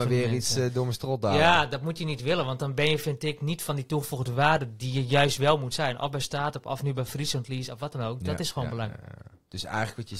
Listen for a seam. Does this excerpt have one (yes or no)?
no